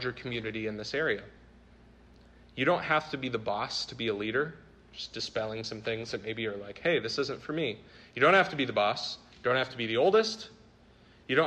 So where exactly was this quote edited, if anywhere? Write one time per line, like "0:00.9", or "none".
none